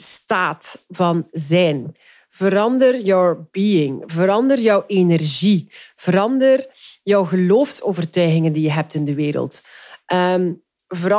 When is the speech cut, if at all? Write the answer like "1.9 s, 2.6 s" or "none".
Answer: none